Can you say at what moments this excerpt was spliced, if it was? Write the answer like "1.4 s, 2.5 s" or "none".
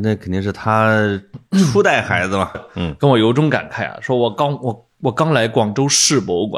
2.5 s